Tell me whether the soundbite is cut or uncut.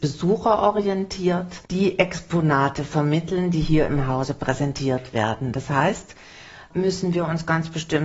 cut